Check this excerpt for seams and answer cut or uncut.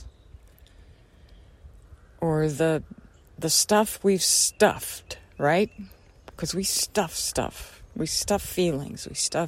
uncut